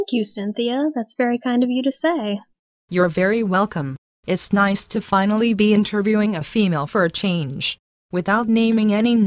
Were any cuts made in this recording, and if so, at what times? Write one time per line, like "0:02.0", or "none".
none